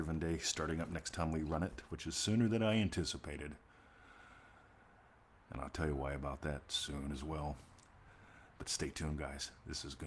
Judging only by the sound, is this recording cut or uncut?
uncut